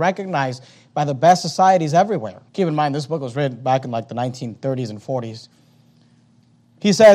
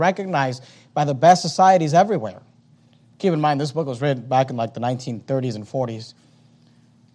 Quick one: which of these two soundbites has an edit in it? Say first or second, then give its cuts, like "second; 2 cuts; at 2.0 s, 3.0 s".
first; 1 cut; at 2.5 s